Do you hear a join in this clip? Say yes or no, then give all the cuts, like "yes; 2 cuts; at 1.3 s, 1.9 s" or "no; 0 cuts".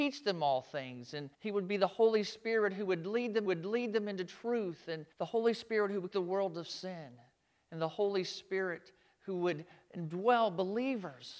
yes; 4 cuts; at 1.3 s, 3.4 s, 5.1 s, 6.1 s